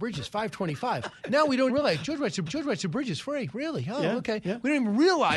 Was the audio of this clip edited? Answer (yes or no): yes